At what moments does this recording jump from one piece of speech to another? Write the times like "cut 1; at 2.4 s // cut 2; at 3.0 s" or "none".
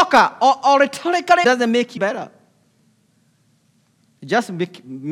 cut 1; at 1.4 s // cut 2; at 2.0 s